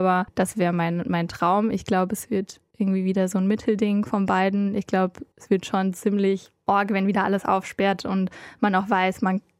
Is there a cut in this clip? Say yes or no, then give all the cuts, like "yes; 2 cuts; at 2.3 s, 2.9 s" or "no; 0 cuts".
yes; 1 cut; at 5.3 s